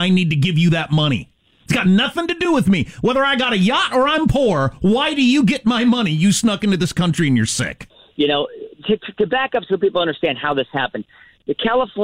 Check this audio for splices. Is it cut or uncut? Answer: uncut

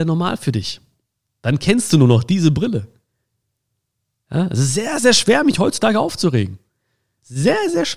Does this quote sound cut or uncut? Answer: uncut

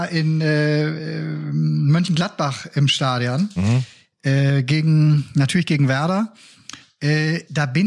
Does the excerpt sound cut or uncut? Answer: uncut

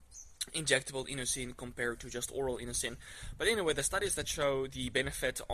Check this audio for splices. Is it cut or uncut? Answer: uncut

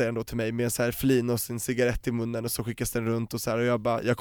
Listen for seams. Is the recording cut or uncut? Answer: uncut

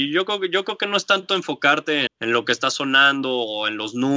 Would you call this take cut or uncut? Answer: cut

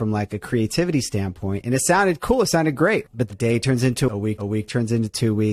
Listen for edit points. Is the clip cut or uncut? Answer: cut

